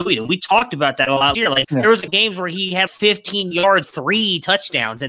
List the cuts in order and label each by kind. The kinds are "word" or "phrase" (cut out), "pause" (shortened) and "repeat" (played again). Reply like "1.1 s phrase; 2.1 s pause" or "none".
1.3 s word; 1.6 s word; 2.1 s word; 2.9 s word; 3.8 s word